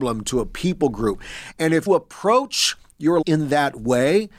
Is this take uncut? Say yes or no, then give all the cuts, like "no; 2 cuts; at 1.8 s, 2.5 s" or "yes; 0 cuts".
no; 2 cuts; at 1.9 s, 3.2 s